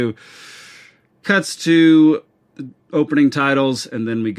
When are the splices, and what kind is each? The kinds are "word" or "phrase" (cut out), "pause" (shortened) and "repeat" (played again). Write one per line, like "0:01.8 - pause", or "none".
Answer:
none